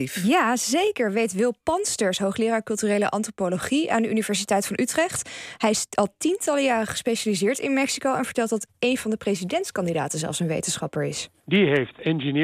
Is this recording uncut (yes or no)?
yes